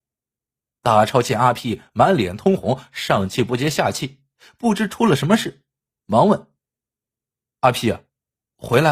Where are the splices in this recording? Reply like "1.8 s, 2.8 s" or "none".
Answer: none